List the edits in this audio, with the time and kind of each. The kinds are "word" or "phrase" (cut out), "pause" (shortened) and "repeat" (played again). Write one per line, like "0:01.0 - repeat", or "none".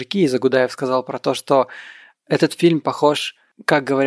none